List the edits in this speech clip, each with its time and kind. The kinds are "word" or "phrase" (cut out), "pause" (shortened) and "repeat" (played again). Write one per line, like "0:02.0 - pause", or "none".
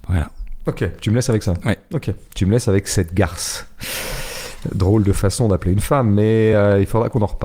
none